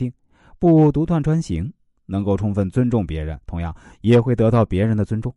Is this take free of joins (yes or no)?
no